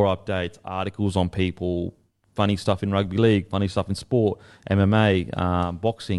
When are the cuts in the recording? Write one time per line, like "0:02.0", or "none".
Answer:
none